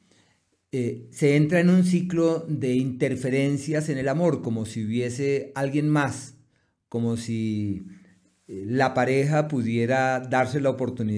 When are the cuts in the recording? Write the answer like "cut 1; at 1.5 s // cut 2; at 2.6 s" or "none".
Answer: none

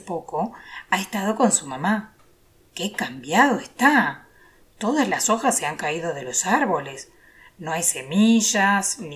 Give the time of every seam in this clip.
none

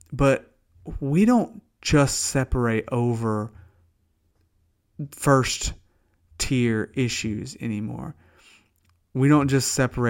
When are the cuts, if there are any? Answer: none

